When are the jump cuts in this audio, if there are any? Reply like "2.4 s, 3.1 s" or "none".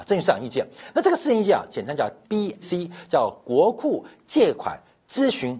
2.2 s, 2.6 s

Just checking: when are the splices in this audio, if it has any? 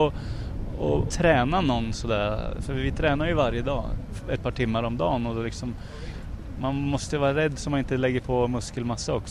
1.1 s

